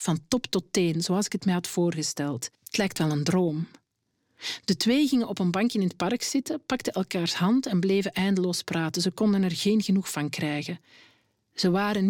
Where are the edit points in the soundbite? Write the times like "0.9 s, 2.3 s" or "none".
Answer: 2.5 s